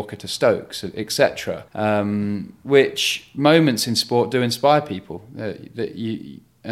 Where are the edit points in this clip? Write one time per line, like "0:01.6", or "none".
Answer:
0:01.7

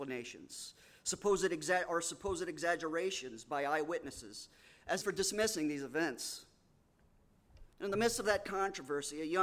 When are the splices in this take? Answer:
0:05.0
0:07.7

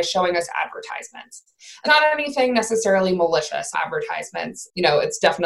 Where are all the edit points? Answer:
0:01.9
0:03.7

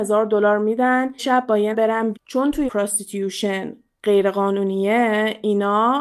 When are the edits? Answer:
0:01.2
0:01.7
0:02.1
0:02.7

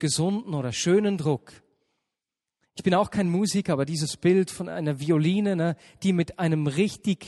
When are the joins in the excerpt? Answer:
none

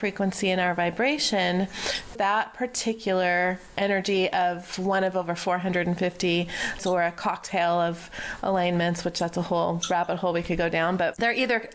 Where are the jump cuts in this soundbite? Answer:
0:02.2
0:06.8

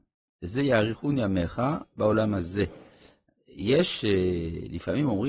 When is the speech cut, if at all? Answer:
none

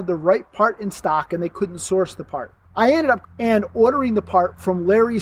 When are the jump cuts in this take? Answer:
0:02.6
0:03.2

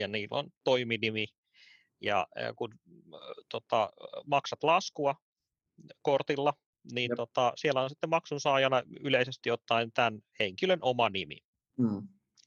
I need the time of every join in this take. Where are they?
none

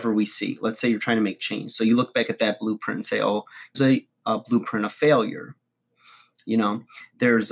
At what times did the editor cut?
0:03.7

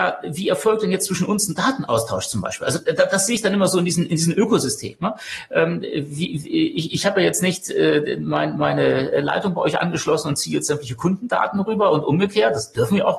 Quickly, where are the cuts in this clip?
none

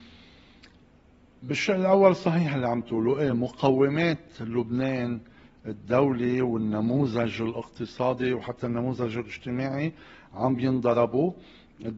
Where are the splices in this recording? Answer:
none

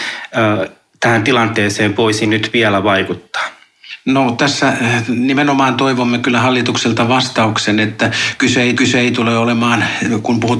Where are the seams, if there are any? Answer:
0:08.7

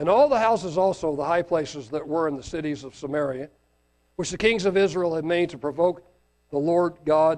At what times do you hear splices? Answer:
none

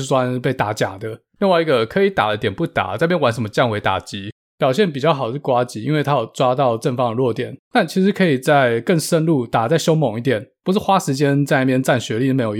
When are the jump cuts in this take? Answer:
none

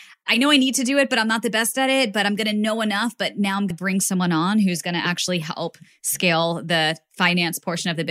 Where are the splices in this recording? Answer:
0:03.7

